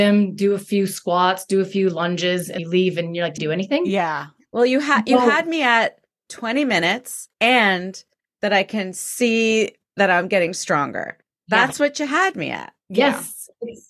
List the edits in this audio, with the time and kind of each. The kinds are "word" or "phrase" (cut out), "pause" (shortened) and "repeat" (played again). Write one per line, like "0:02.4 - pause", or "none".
0:02.6 - word
0:03.4 - phrase
0:07.3 - pause